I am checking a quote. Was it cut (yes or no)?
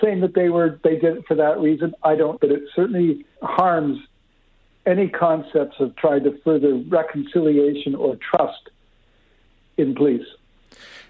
yes